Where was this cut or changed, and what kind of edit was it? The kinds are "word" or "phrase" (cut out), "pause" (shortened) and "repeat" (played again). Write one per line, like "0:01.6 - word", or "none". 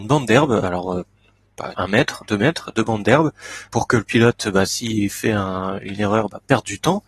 0:01.7 - word
0:03.7 - word